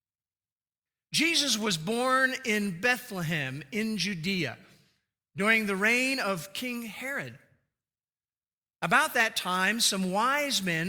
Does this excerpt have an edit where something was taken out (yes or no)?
no